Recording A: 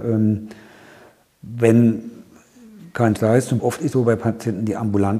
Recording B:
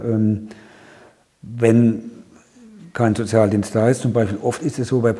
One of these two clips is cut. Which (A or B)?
A